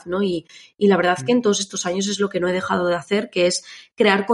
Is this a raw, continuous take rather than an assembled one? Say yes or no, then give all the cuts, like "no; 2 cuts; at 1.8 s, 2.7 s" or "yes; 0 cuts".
yes; 0 cuts